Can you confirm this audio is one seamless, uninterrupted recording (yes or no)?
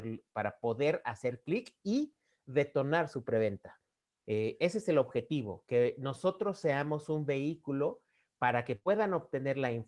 yes